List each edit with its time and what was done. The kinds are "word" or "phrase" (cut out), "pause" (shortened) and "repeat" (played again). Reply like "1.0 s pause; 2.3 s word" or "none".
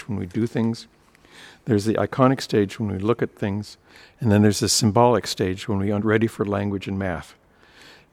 none